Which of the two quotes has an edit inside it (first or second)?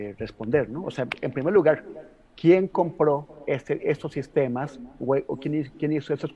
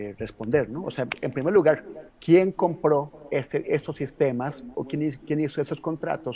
second